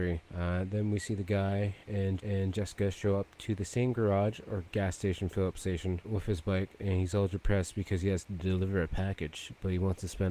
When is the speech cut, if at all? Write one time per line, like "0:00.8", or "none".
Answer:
0:02.2
0:06.0